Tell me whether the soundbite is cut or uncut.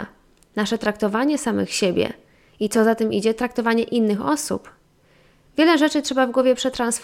uncut